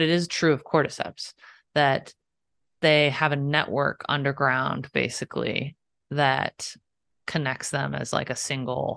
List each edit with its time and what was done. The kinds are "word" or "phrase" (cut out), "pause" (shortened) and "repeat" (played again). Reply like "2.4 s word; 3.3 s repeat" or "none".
none